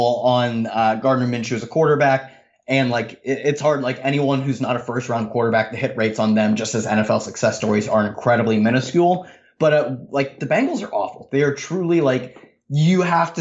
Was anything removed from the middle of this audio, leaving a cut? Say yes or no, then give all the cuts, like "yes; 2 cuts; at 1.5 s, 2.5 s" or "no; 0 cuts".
no; 0 cuts